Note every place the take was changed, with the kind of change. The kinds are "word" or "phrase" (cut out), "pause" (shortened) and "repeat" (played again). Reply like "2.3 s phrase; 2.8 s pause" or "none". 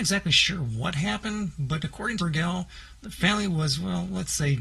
2.2 s phrase